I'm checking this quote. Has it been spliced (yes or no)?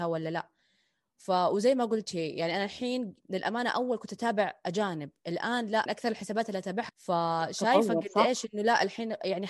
yes